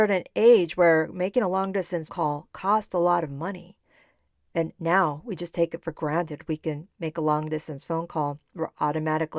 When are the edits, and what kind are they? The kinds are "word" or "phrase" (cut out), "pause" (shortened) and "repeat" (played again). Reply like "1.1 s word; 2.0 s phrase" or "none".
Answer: 2.1 s word